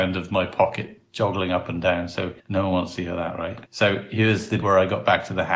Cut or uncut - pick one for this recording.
cut